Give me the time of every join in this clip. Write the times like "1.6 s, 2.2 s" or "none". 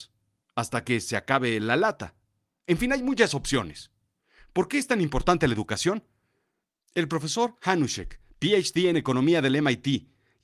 8.3 s